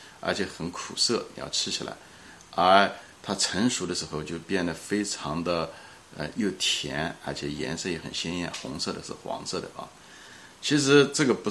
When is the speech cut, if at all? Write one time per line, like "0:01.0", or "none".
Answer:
none